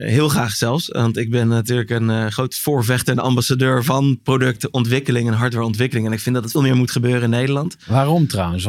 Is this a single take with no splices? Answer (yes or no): no